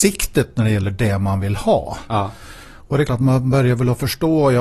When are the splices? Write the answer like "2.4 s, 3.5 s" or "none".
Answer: 3.1 s